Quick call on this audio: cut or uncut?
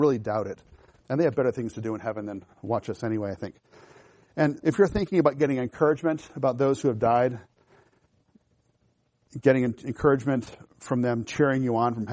cut